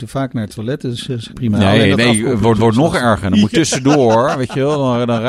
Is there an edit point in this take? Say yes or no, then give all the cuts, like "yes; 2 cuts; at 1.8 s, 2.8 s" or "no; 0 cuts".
yes; 3 cuts; at 1.3 s, 2.5 s, 3.5 s